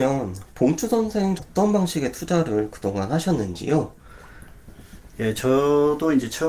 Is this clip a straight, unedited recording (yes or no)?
no